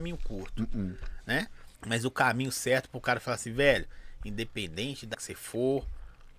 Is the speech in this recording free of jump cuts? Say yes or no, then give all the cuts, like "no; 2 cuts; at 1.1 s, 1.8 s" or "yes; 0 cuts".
no; 2 cuts; at 1.7 s, 5.1 s